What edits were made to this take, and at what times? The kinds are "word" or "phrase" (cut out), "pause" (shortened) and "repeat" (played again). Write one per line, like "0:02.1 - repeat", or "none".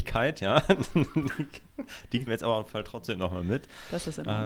0:02.3 - word
0:02.7 - word